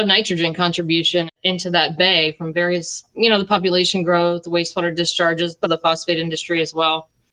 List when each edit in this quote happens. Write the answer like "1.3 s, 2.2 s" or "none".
5.6 s